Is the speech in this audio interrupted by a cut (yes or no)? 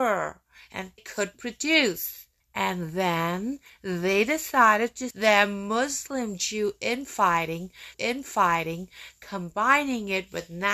yes